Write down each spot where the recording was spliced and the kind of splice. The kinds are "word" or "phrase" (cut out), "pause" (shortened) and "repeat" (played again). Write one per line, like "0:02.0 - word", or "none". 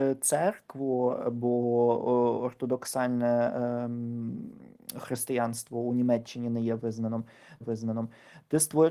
0:07.6 - repeat